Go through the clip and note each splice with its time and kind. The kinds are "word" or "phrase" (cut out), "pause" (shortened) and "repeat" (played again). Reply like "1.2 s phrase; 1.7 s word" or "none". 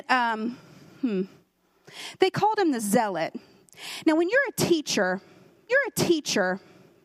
5.7 s repeat